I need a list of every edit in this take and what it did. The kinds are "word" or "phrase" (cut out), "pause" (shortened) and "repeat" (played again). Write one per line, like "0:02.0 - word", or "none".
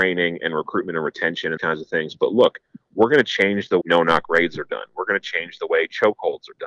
0:01.6 - word
0:03.8 - word